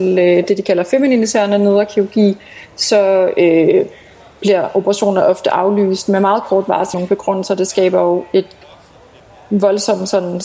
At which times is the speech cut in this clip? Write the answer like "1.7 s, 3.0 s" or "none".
6.9 s